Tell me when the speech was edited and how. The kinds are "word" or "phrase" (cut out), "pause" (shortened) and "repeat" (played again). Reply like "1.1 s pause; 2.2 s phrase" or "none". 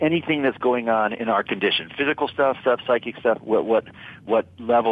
2.6 s word; 3.4 s phrase